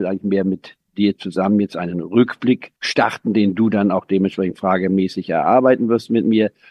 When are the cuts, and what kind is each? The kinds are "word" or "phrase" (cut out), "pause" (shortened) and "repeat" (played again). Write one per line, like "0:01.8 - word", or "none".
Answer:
0:02.8 - pause